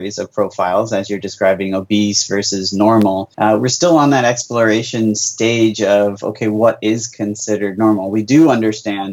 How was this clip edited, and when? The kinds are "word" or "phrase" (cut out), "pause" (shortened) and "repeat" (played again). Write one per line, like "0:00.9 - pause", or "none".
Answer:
0:03.3 - pause